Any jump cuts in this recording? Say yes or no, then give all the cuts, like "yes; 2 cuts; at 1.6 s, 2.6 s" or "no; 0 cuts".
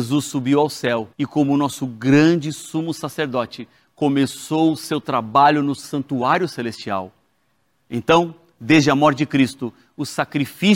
yes; 1 cut; at 1.1 s